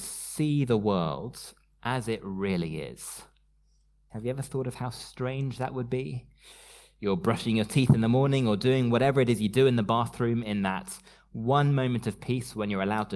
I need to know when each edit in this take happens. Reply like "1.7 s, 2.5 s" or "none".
none